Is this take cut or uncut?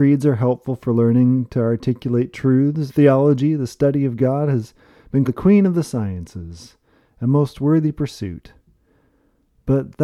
cut